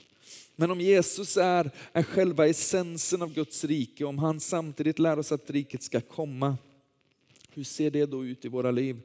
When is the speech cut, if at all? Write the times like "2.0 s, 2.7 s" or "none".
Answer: 5.4 s